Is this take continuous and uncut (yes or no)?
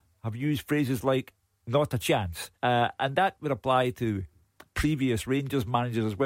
no